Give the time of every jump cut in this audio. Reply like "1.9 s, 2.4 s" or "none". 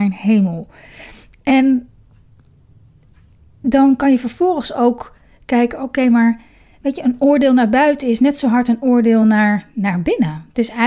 none